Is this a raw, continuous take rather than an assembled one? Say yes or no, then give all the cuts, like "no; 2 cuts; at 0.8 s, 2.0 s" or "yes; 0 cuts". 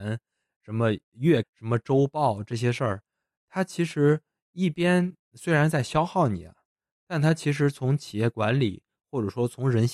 no; 1 cut; at 1.4 s